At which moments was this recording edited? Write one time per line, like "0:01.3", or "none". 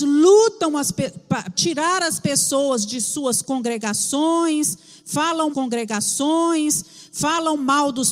0:01.5
0:05.5